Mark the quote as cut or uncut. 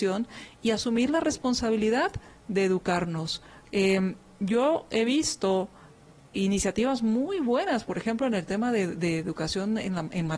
uncut